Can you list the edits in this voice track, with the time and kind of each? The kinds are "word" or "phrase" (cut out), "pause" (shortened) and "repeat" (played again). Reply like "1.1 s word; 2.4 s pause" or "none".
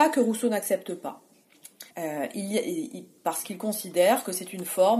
1.9 s pause